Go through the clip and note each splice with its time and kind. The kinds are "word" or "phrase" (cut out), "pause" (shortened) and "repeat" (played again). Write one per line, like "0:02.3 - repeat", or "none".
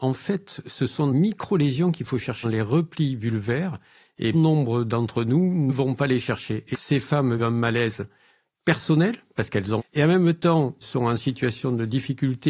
0:01.1 - word
0:02.4 - word
0:04.3 - word
0:05.7 - word
0:06.7 - word
0:07.4 - word
0:09.8 - word
0:10.8 - word